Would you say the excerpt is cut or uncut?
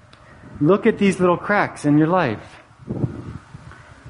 uncut